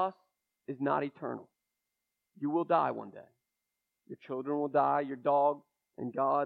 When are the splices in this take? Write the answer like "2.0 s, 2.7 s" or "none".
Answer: none